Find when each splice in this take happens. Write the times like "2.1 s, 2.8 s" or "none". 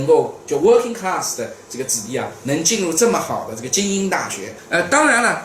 none